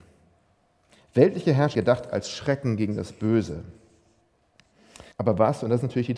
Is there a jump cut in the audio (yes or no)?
yes